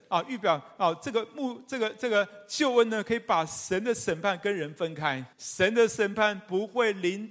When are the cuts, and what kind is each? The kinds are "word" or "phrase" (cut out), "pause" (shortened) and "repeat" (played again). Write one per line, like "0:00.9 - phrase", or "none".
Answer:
0:05.3 - pause